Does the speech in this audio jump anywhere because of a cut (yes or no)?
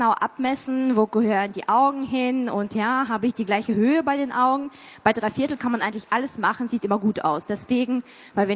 no